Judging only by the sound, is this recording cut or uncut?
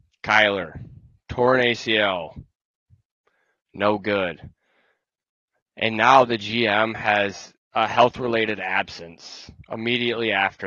uncut